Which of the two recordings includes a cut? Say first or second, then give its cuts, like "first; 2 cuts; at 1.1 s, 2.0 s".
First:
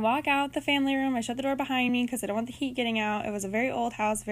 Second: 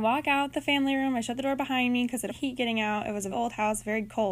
second; 2 cuts; at 2.3 s, 3.3 s